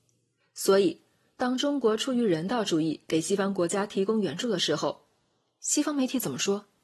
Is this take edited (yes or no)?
no